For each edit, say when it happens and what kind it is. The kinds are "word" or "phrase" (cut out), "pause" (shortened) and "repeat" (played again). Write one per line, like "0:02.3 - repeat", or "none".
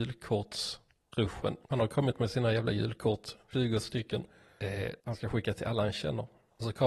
0:01.6 - pause
0:03.4 - pause
0:05.0 - pause